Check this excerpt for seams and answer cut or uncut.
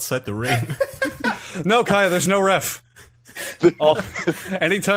uncut